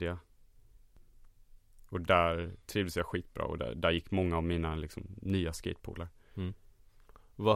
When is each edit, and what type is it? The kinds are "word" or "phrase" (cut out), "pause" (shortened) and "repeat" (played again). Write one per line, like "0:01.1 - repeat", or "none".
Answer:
none